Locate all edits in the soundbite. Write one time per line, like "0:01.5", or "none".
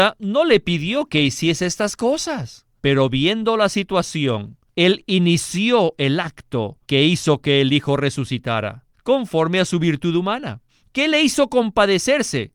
0:02.8
0:04.7
0:06.8
0:08.9
0:10.7